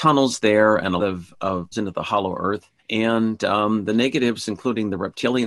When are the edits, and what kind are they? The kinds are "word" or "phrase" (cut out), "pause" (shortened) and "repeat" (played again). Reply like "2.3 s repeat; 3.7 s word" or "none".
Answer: 1.0 s word; 1.7 s word; 2.8 s pause